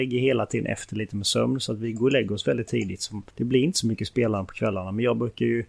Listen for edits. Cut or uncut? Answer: cut